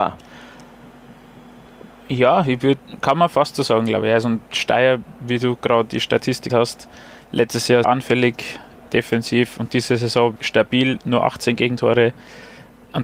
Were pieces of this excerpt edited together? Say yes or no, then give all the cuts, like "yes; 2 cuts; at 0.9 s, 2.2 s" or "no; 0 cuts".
yes; 4 cuts; at 5.9 s, 6.5 s, 7.8 s, 10.4 s